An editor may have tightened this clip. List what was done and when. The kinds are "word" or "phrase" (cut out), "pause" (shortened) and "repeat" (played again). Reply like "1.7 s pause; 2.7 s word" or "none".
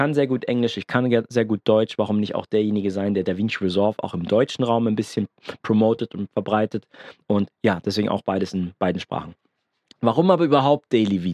none

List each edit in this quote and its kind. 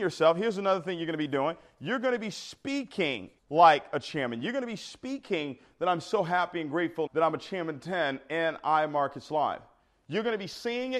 3.4 s pause; 7.1 s word

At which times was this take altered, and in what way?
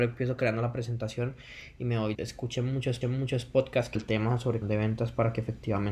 2.1 s word; 3.0 s repeat; 3.9 s phrase; 4.6 s phrase

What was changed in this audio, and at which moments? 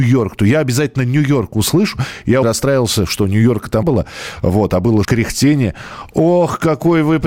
2.4 s word; 3.8 s word; 5.0 s word

